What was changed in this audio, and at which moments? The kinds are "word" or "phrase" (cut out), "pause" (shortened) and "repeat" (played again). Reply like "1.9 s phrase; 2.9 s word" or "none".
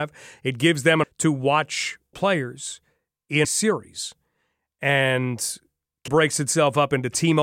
1.0 s word; 2.1 s word; 3.4 s word; 6.1 s word